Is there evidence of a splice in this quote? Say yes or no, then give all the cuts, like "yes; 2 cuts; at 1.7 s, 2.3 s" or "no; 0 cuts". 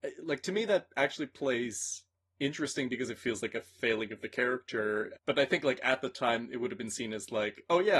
yes; 1 cut; at 5.2 s